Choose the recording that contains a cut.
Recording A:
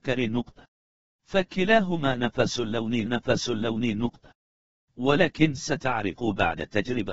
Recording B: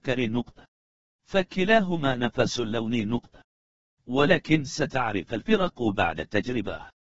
A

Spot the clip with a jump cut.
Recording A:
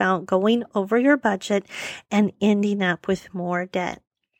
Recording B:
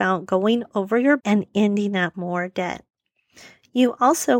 B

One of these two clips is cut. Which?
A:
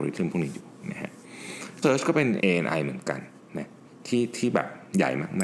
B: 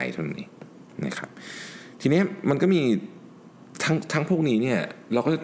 A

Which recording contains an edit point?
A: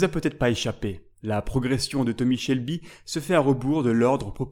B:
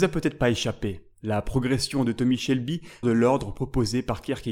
B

